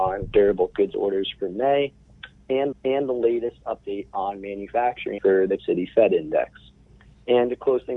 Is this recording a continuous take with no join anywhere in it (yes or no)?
no